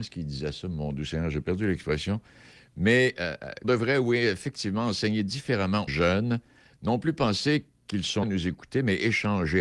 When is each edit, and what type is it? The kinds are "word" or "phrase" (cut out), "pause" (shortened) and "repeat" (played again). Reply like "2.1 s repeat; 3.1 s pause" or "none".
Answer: 1.4 s word; 3.6 s word; 5.9 s word; 8.2 s word

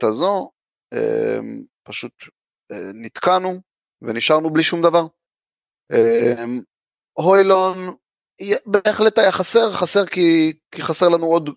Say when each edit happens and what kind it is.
none

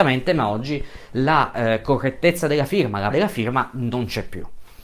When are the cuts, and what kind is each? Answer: 3.1 s word

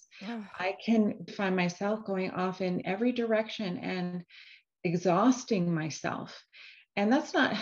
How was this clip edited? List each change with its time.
1.3 s word; 2.8 s word

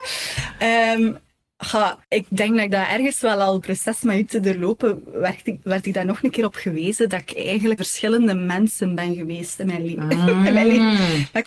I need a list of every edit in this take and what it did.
2.0 s pause; 3.6 s phrase; 7.8 s word

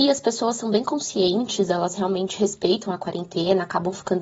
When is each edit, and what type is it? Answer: none

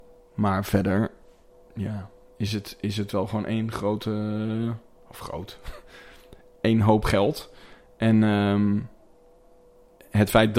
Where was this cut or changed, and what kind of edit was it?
none

